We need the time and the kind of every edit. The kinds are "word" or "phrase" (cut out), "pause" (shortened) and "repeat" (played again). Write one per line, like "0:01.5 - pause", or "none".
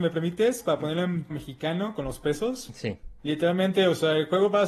0:01.3 - word